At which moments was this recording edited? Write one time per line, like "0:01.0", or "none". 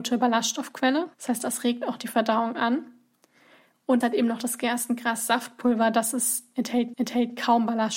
0:01.1
0:04.0
0:06.9